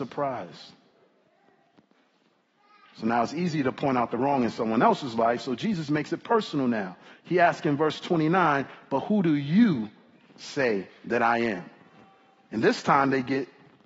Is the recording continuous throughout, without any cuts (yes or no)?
yes